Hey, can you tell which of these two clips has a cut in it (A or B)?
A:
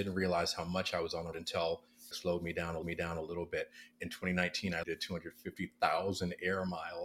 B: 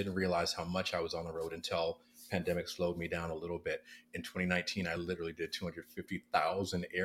A